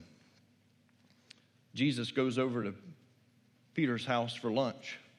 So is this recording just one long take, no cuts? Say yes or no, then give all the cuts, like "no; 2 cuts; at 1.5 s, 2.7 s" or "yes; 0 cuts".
yes; 0 cuts